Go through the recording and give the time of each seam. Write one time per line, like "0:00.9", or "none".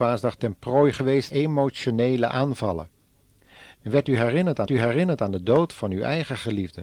0:01.3
0:04.7